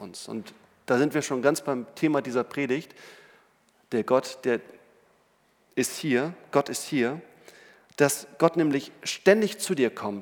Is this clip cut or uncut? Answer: uncut